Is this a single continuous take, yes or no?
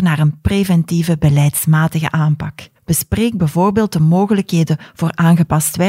no